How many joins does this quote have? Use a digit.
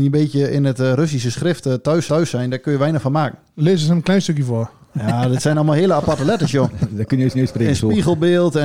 2